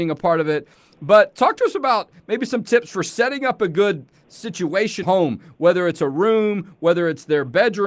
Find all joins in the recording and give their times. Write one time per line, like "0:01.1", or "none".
0:05.0